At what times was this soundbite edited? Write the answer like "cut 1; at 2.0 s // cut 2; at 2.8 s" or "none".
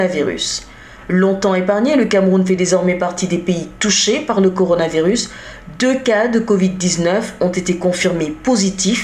none